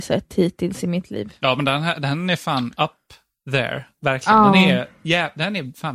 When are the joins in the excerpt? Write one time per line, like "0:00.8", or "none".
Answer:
none